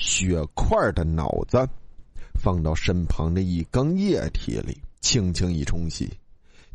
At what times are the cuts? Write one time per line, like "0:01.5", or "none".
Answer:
0:05.0